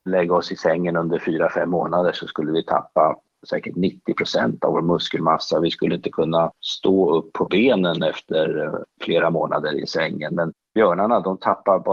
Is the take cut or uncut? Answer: uncut